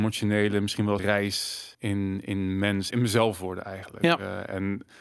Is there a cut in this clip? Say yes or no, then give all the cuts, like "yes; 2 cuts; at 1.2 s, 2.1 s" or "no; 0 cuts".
yes; 3 cuts; at 1.0 s, 1.7 s, 2.9 s